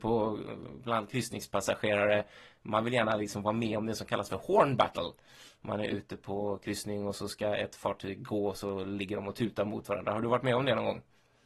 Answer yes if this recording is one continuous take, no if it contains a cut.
yes